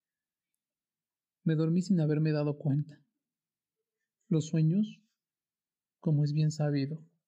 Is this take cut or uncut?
uncut